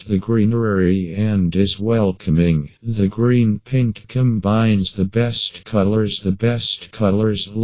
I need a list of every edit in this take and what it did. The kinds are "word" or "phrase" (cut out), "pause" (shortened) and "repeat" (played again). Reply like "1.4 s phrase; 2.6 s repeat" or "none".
2.8 s pause; 4.0 s word; 6.2 s repeat